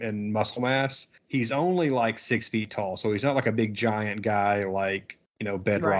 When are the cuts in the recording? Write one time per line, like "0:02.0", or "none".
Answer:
none